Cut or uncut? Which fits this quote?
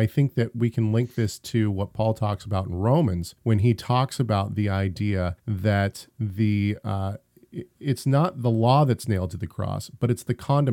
cut